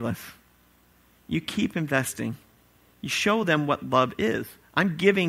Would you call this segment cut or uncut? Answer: uncut